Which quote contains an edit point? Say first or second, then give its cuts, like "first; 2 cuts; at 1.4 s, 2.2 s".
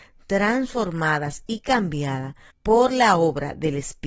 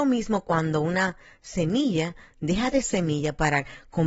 second; 1 cut; at 2.8 s